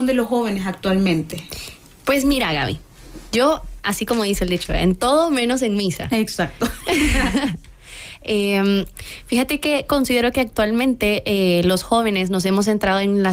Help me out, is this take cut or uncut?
uncut